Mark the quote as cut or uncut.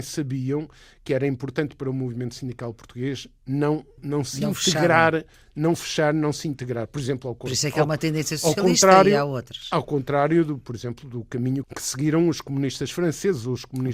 uncut